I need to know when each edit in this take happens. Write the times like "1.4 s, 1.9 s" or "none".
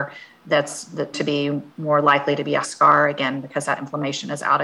1.1 s, 1.7 s, 2.6 s

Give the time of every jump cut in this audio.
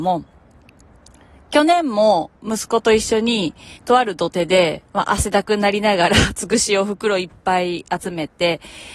2.4 s, 3.8 s, 4.9 s

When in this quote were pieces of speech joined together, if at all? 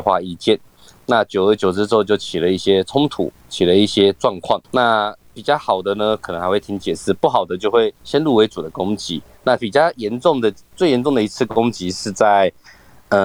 4.6 s, 8.0 s

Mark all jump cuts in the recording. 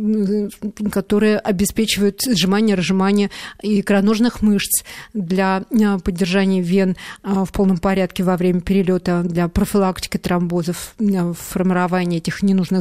none

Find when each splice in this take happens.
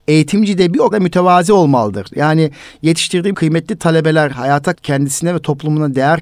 0.9 s, 3.3 s, 4.7 s

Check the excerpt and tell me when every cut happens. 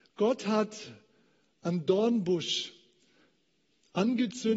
none

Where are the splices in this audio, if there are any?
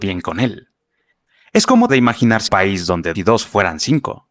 1.9 s, 2.5 s, 3.2 s

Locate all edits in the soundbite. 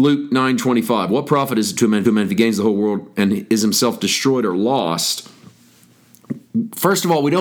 2.0 s

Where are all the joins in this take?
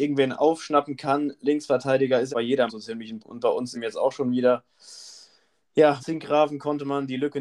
2.3 s, 2.7 s, 3.2 s, 3.7 s, 6.0 s

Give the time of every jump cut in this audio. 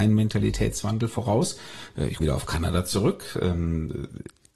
2.2 s

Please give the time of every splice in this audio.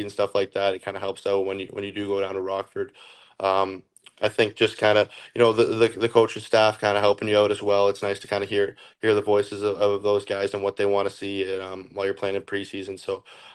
none

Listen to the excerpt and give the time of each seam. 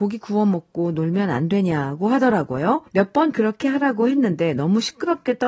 2.9 s

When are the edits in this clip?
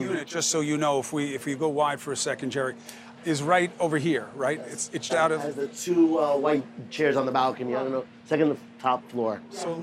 3.2 s, 5.1 s

